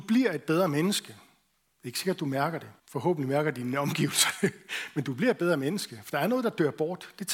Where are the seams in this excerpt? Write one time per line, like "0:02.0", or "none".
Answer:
0:02.8

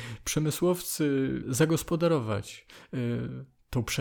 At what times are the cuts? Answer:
0:01.4

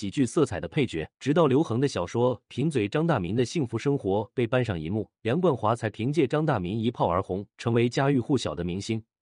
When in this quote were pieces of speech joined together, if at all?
0:01.2
0:05.2
0:07.5

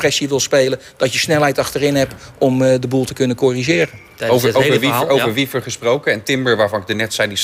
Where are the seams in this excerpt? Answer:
none

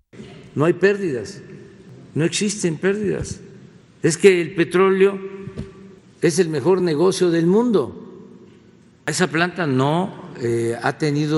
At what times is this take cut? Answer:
none

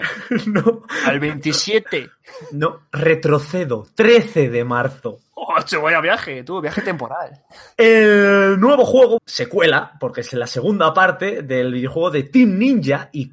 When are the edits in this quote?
0:09.2

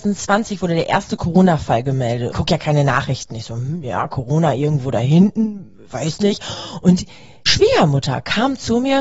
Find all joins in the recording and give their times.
0:02.3
0:07.5

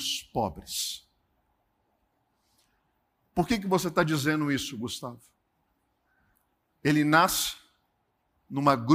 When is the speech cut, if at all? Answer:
none

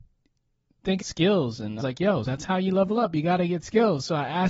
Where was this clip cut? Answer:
0:01.0
0:01.8
0:02.2

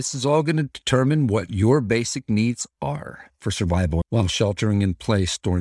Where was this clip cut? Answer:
none

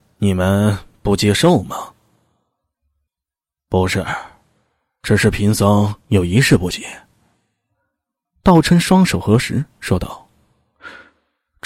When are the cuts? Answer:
0:06.0

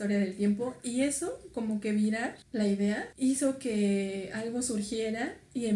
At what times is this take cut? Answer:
0:02.4
0:03.1

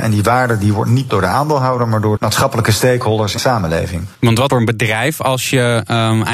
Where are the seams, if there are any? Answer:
0:01.1
0:02.2
0:03.4
0:04.1
0:04.5

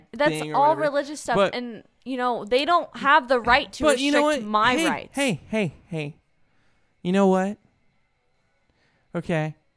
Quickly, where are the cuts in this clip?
none

